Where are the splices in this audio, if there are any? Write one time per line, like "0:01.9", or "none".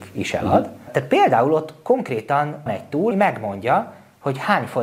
0:02.7
0:03.1